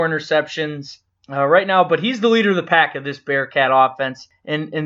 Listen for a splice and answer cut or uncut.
uncut